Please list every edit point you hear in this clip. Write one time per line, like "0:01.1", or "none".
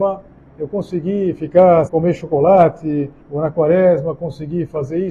0:01.9
0:03.2